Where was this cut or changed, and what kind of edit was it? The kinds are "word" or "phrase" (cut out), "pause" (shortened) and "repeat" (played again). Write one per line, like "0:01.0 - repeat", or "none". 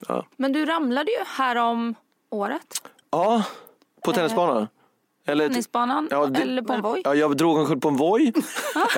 none